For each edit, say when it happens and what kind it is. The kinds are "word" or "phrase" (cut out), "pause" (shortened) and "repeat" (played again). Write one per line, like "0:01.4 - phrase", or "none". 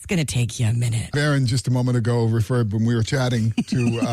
0:01.1 - word